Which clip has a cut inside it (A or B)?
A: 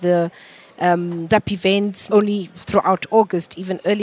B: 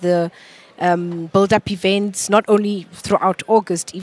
A